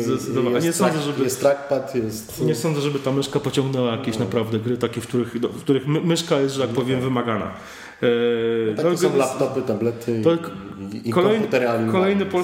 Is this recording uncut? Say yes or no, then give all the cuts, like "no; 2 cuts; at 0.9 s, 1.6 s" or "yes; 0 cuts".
yes; 0 cuts